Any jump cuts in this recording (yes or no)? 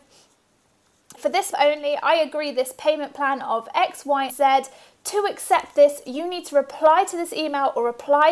yes